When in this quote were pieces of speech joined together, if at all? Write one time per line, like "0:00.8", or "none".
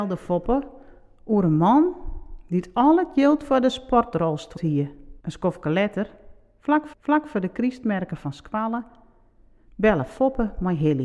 0:04.6
0:05.2
0:06.9